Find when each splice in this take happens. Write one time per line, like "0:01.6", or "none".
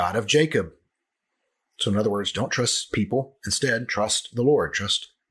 none